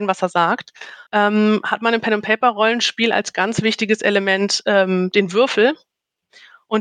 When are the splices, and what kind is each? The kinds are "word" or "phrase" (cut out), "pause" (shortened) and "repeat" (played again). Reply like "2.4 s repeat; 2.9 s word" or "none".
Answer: 1.1 s pause

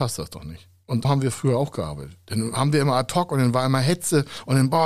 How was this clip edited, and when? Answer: 1.0 s word

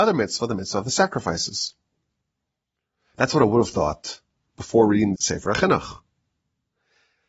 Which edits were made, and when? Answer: 5.2 s word

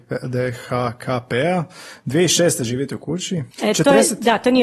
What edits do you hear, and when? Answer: 3.5 s pause

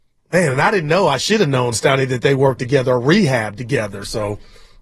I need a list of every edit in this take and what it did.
2.6 s word

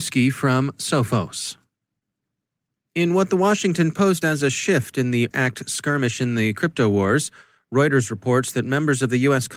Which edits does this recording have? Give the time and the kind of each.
4.2 s word; 5.3 s word

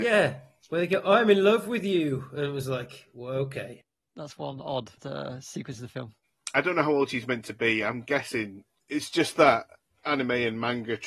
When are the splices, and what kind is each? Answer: none

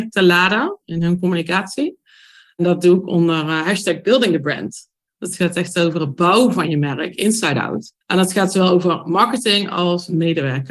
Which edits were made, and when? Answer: 8.0 s pause

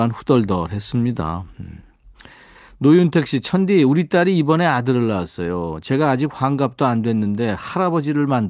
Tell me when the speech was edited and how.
none

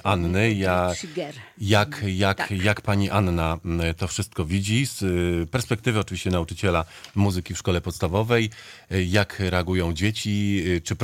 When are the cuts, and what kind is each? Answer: none

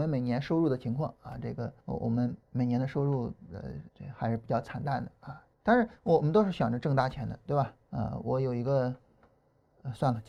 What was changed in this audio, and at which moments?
1.8 s pause; 2.4 s pause; 3.9 s pause; 5.5 s pause; 7.8 s pause

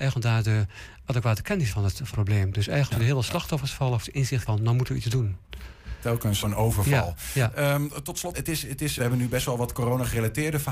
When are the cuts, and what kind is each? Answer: 1.7 s word; 2.1 s word; 2.9 s word; 4.0 s word; 4.5 s word; 6.4 s word; 8.3 s word; 9.0 s word

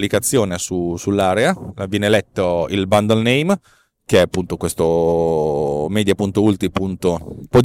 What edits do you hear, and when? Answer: none

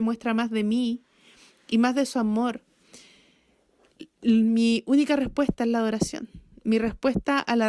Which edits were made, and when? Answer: none

